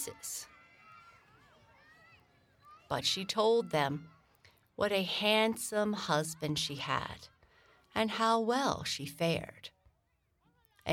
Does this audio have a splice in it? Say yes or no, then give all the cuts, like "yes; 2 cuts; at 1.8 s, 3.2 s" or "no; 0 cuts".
no; 0 cuts